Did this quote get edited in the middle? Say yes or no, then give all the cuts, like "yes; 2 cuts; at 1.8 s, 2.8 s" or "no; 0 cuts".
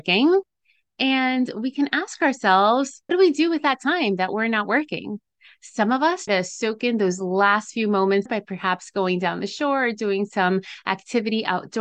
yes; 3 cuts; at 3.1 s, 6.3 s, 8.3 s